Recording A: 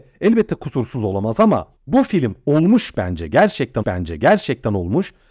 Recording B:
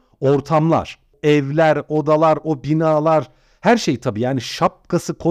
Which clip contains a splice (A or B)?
A